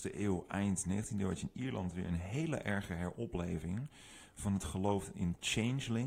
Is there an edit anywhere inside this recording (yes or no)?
no